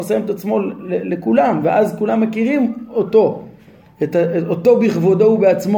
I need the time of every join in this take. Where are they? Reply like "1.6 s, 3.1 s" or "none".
none